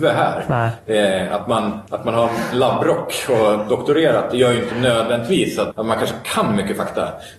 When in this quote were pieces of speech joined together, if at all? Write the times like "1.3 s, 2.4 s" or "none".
1.9 s, 5.7 s